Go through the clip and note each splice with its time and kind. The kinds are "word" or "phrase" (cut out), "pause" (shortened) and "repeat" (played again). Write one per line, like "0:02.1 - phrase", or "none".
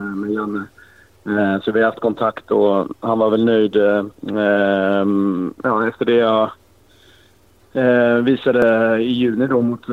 0:04.1 - pause